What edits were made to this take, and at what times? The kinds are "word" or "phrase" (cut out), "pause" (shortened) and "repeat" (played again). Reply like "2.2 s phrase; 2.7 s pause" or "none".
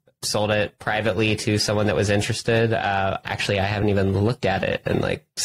none